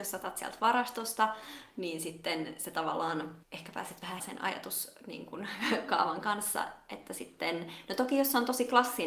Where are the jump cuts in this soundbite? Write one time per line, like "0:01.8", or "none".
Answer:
0:03.4
0:04.2